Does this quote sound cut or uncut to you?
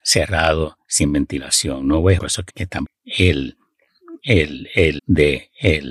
cut